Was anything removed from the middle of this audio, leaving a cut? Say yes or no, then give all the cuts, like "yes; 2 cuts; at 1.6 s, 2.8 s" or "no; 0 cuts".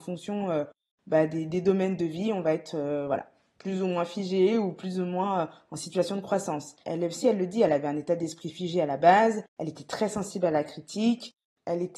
yes; 2 cuts; at 6.8 s, 9.5 s